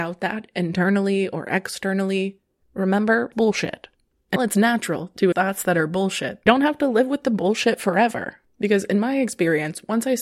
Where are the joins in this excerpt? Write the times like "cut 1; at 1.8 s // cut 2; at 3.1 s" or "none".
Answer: cut 1; at 3.3 s // cut 2; at 4.4 s // cut 3; at 5.3 s // cut 4; at 6.5 s